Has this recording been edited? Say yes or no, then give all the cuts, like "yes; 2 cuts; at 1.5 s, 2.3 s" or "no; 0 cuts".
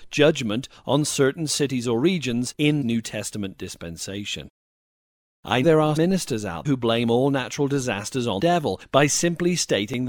yes; 5 cuts; at 2.8 s, 5.6 s, 6.0 s, 6.6 s, 8.4 s